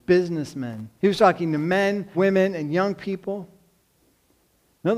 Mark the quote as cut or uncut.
cut